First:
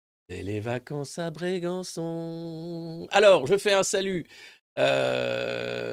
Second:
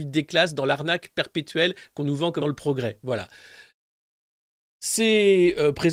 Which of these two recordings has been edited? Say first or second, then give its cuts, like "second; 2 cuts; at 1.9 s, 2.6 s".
second; 1 cut; at 2.4 s